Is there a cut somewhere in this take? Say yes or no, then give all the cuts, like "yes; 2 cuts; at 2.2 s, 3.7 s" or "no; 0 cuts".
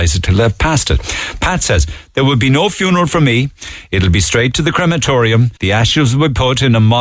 yes; 1 cut; at 5.6 s